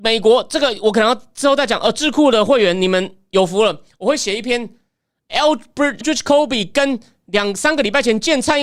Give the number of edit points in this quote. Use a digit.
1